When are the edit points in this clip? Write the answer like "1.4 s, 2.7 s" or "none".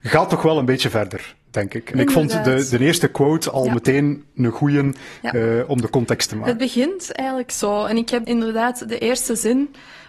1.9 s, 2.7 s, 6.3 s, 8.2 s